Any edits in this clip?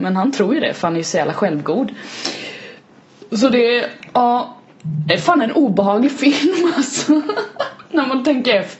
no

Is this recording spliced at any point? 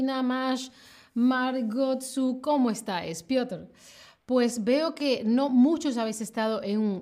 no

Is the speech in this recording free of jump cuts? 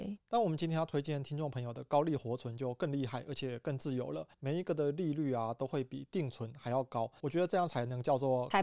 no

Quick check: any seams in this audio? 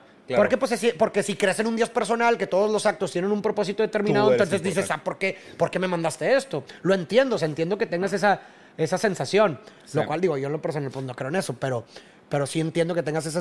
no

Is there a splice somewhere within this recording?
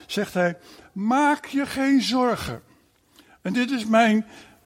no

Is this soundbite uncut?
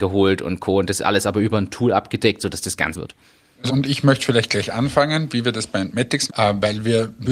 no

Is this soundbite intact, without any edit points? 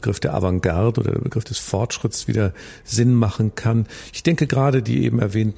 yes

